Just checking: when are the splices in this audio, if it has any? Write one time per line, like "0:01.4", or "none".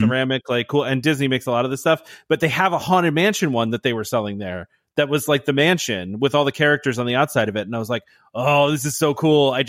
none